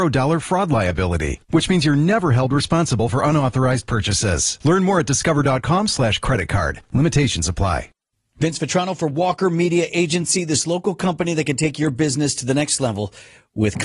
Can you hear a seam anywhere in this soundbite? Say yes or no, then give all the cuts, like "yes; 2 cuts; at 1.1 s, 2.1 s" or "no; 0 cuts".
no; 0 cuts